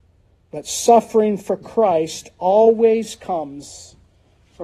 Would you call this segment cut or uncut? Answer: uncut